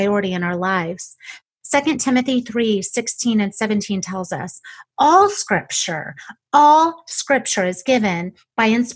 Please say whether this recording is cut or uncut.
uncut